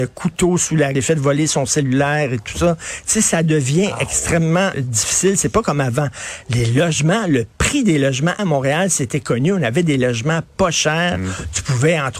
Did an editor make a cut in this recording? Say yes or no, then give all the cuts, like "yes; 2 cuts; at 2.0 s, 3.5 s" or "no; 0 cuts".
yes; 3 cuts; at 0.9 s, 4.7 s, 8.4 s